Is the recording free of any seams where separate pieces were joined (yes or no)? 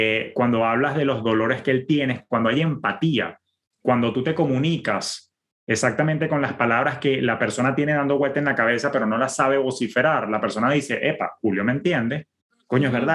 yes